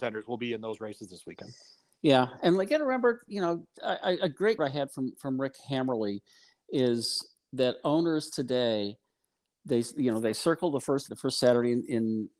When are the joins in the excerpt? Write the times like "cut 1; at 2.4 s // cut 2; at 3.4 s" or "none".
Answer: cut 1; at 3.8 s // cut 2; at 4.6 s // cut 3; at 11.1 s